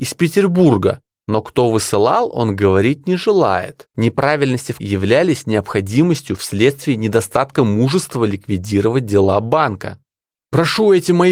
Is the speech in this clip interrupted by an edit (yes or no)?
yes